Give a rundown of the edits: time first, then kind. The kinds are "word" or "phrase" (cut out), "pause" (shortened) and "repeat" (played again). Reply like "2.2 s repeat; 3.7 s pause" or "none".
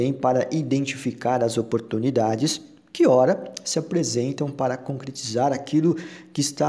none